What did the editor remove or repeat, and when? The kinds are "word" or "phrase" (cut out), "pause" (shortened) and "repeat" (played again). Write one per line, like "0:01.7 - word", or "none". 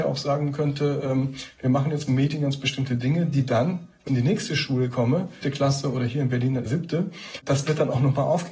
0:02.1 - phrase
0:04.1 - word
0:05.4 - word
0:06.7 - word